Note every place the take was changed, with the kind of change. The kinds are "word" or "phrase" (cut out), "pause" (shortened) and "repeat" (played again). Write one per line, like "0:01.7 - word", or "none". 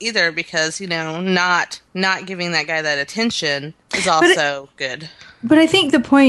0:01.9 - pause
0:03.8 - pause